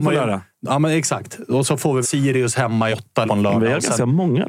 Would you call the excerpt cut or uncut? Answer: cut